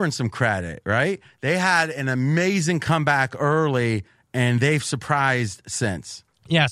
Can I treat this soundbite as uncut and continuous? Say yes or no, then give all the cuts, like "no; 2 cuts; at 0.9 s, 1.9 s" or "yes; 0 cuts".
yes; 0 cuts